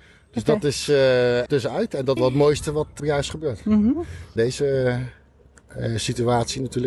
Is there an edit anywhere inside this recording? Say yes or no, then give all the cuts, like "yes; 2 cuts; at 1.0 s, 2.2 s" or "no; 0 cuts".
yes; 4 cuts; at 1.5 s, 2.2 s, 3.0 s, 4.4 s